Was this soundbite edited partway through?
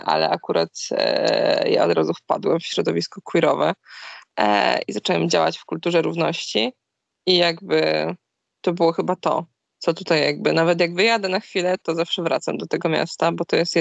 no; 0 cuts

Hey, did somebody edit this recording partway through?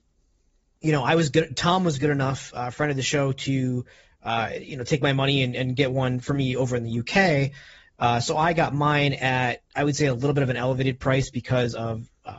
no; 0 cuts

